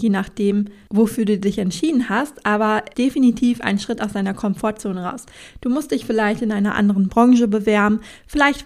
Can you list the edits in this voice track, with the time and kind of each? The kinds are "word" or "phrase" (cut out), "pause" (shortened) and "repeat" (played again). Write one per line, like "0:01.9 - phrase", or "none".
0:02.9 - phrase